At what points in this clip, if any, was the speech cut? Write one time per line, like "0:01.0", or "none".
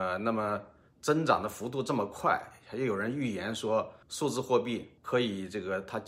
0:04.0
0:05.0